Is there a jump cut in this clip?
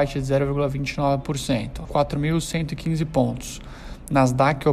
yes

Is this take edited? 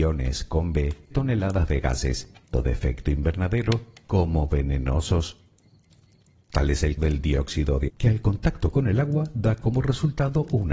yes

